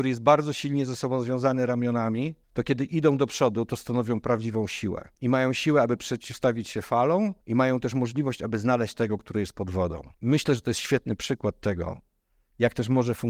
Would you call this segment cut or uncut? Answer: cut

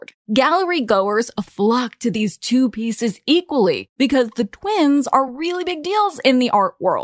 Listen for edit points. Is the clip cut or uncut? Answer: uncut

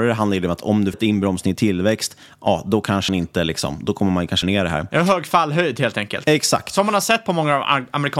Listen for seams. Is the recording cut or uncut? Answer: cut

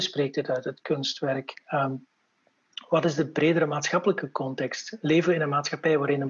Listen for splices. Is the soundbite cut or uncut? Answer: uncut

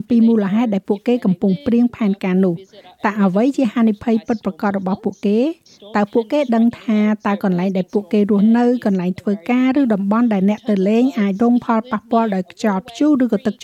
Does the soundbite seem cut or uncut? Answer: uncut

